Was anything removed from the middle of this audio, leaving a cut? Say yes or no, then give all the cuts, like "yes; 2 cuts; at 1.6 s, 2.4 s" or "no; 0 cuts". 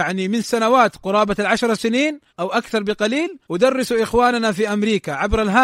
yes; 2 cuts; at 2.3 s, 3.4 s